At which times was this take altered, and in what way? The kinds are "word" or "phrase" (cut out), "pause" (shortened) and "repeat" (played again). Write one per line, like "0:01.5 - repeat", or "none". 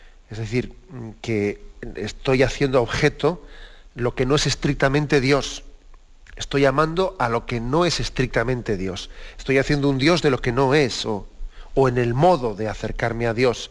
none